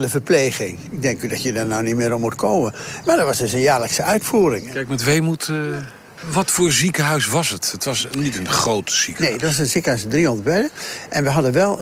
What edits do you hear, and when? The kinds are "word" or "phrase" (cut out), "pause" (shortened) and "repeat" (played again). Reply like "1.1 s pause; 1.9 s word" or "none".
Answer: none